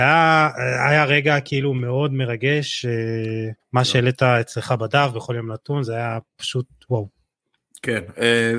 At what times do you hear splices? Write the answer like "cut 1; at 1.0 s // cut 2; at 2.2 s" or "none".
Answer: cut 1; at 3.6 s